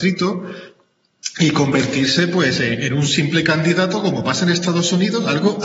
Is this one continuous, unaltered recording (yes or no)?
yes